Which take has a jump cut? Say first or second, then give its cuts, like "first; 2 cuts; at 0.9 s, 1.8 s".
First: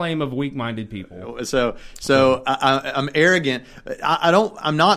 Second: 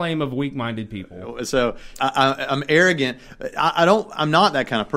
second; 1 cut; at 2.0 s